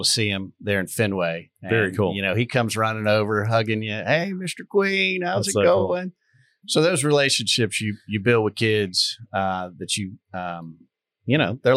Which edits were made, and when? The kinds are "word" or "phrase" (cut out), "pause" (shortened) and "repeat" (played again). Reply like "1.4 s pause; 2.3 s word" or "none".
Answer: none